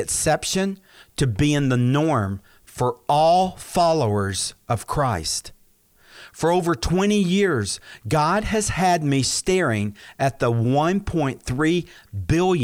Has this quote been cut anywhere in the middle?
no; 0 cuts

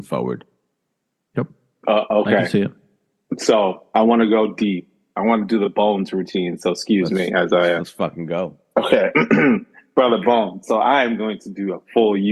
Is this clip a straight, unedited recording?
yes; 0 cuts

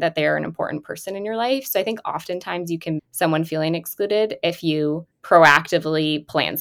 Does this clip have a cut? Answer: yes; 2 cuts; at 3.0 s, 5.1 s

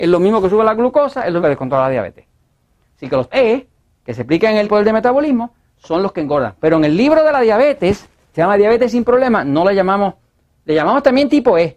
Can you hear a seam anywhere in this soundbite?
yes; 4 cuts; at 1.4 s, 3.3 s, 4.6 s, 8.3 s

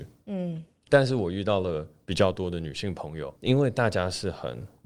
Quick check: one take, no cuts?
no; 1 cut; at 3.4 s

